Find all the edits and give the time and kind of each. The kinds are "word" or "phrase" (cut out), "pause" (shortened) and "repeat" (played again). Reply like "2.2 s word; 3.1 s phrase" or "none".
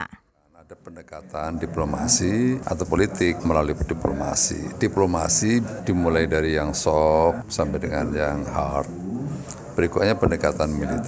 2.9 s word